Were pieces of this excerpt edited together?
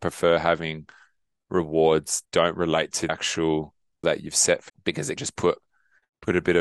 yes; 5 cuts; at 2.2 s, 3.1 s, 4.0 s, 4.7 s, 5.2 s

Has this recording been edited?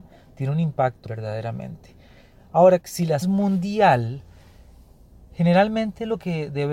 yes; 3 cuts; at 1.0 s, 2.8 s, 3.2 s

